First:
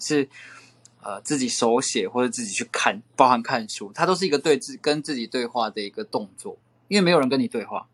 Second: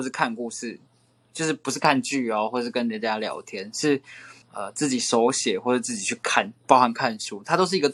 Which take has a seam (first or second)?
second